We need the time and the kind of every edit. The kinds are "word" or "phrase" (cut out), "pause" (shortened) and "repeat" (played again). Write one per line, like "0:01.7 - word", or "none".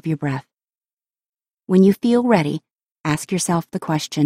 none

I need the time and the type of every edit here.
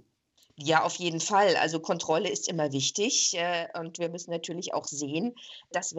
none

